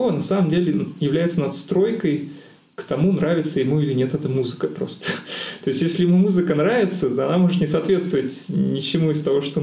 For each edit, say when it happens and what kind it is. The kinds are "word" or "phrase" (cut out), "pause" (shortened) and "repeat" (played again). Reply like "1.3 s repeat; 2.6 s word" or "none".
none